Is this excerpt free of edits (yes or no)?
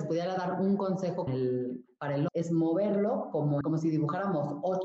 no